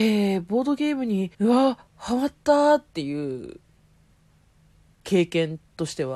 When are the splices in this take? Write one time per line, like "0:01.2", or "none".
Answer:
0:01.3
0:01.9

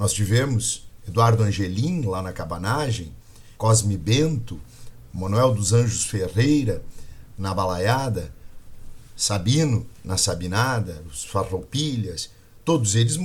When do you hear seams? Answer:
0:03.5

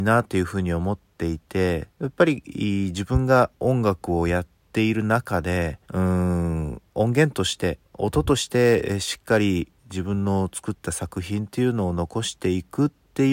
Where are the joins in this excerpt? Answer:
0:01.9
0:03.5
0:05.8
0:07.9
0:09.8

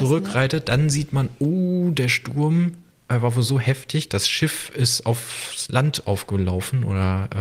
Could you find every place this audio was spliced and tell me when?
none

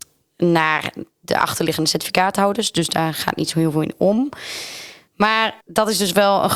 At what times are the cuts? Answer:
0:05.6

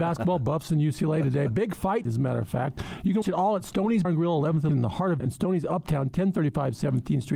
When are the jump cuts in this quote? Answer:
0:02.0
0:03.2
0:04.0
0:04.7
0:05.2

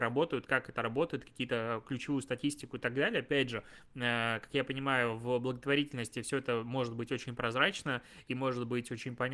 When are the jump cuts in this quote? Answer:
none

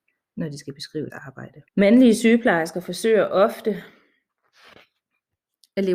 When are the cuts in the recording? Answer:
0:01.1
0:01.7

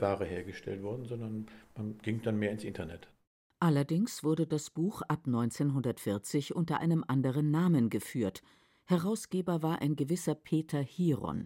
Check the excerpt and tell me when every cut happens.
none

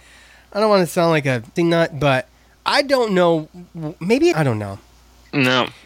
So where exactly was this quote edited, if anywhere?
0:01.6
0:02.6
0:04.3

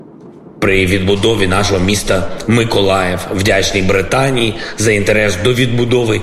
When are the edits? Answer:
none

